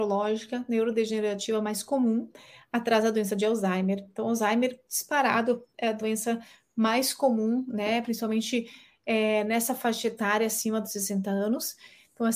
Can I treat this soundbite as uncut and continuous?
yes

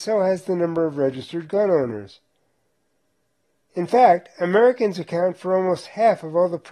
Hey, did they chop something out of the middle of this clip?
no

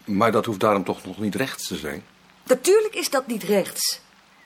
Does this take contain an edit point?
no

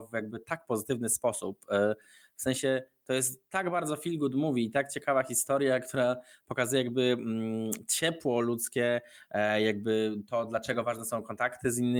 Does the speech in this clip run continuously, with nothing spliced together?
yes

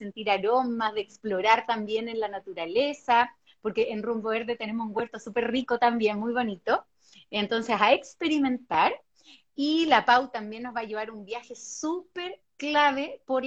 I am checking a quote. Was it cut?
no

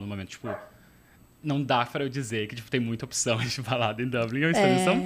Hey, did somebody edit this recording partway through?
no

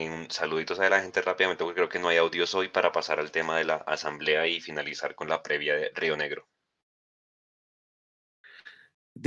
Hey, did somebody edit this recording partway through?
no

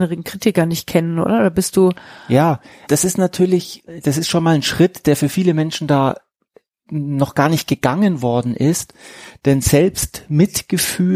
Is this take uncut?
no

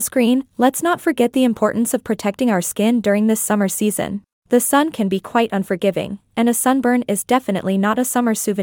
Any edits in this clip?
yes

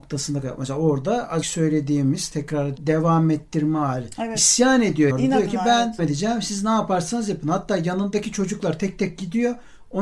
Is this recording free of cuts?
no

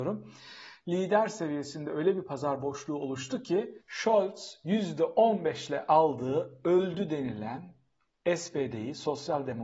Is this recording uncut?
no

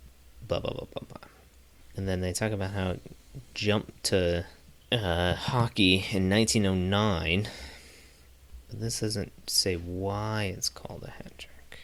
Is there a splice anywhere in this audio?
no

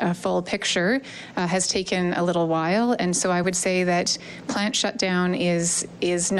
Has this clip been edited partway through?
no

